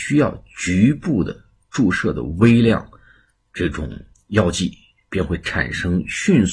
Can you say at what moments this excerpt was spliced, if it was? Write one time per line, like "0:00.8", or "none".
none